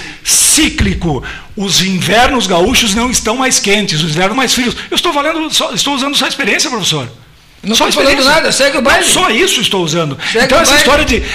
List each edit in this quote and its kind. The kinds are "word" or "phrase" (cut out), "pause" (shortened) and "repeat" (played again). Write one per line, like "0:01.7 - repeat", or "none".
0:04.3 - phrase